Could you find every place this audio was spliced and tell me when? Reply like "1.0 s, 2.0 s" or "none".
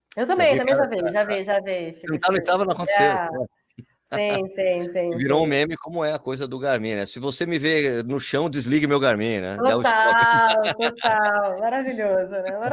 none